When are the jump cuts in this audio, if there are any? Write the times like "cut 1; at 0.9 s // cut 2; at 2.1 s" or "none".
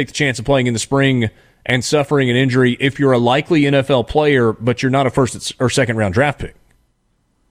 none